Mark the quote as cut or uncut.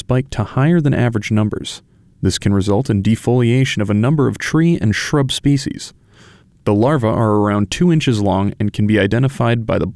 uncut